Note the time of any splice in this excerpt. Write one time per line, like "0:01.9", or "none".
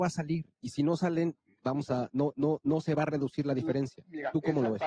none